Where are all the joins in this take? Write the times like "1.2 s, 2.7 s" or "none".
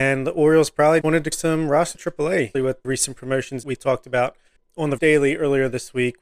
1.0 s, 1.3 s, 1.9 s, 2.5 s, 2.8 s, 3.6 s, 4.6 s, 5.0 s